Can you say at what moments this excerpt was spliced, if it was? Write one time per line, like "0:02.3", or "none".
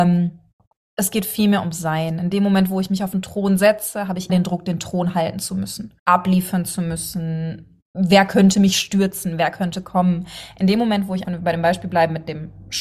0:04.3
0:06.0
0:07.9
0:11.2